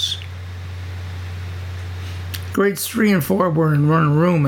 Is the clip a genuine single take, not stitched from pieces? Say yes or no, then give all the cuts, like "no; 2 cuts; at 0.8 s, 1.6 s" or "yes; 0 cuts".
yes; 0 cuts